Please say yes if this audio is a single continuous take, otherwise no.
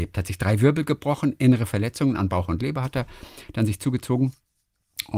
yes